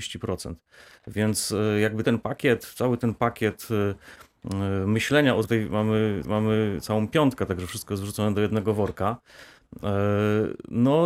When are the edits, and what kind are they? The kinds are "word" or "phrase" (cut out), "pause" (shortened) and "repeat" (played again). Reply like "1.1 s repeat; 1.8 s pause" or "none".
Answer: 2.0 s word; 5.4 s phrase; 6.2 s repeat